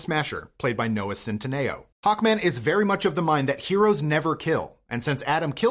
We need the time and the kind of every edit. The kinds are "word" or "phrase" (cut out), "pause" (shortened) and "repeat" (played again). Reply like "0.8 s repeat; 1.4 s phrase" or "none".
1.9 s pause